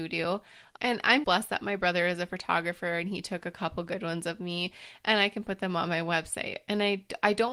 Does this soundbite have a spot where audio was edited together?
yes; 1 cut; at 1.2 s

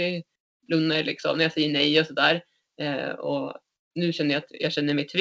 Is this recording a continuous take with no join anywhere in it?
yes; 0 cuts

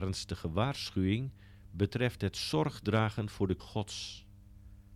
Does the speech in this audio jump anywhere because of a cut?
yes; 1 cut; at 3.6 s

